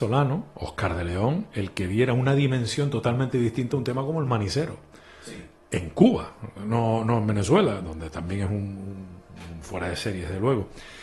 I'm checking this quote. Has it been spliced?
no; 0 cuts

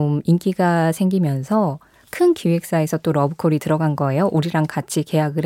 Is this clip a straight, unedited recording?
yes; 0 cuts

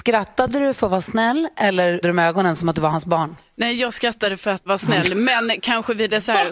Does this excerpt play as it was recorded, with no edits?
no; 2 cuts; at 2.0 s, 4.7 s

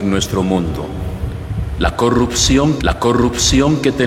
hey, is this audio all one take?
no; 1 cut; at 2.8 s

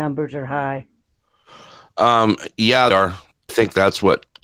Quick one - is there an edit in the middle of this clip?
yes; 2 cuts; at 2.9 s, 3.5 s

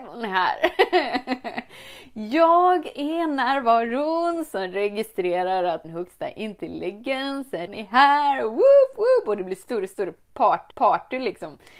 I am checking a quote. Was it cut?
yes; 3 cuts; at 5.8 s, 7.7 s, 10.7 s

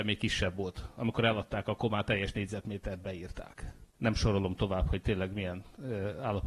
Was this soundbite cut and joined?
yes; 1 cut; at 3.9 s

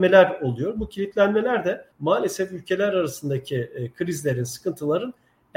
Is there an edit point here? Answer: yes; 1 cut; at 1.9 s

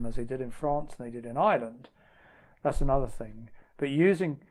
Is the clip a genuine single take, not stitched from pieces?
yes; 0 cuts

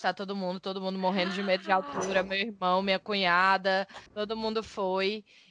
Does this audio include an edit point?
yes; 1 cut; at 4.1 s

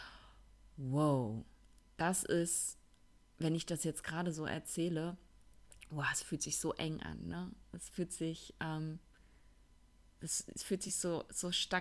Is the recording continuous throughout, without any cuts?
yes; 0 cuts

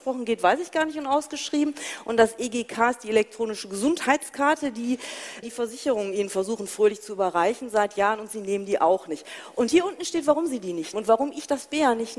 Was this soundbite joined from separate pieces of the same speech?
yes; 2 cuts; at 5.4 s, 10.9 s

